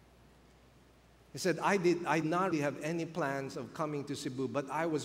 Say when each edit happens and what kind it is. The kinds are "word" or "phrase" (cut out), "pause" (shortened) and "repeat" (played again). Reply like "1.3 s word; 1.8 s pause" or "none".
2.2 s word; 2.5 s word